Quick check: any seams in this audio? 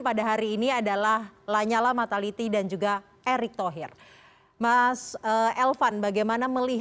no; 0 cuts

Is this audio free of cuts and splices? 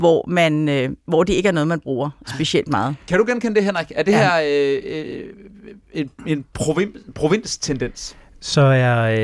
yes; 0 cuts

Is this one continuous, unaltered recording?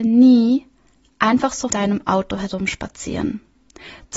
no; 1 cut; at 1.7 s

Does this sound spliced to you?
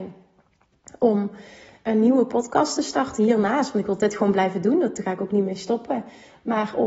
no; 0 cuts

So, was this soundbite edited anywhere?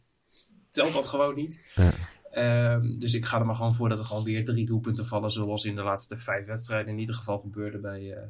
no; 0 cuts

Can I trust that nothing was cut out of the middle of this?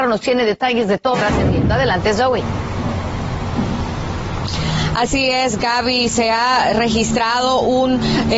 no; 1 cut; at 1.1 s

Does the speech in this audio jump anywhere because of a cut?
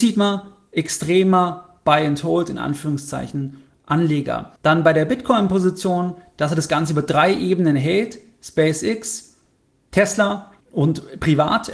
yes; 2 cuts; at 4.6 s, 10.6 s

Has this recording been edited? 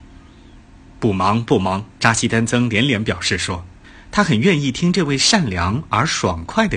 yes; 1 cut; at 1.9 s

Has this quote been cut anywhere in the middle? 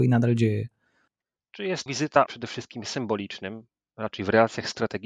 yes; 2 cuts; at 1.9 s, 2.3 s

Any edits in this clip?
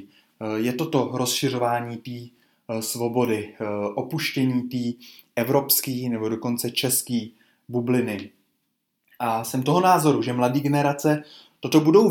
no; 0 cuts

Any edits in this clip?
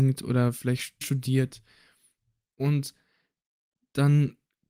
yes; 1 cut; at 1.0 s

